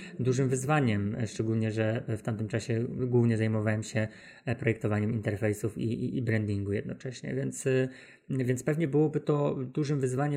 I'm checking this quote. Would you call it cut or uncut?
uncut